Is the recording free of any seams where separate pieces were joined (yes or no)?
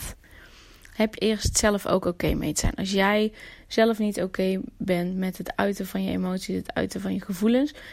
no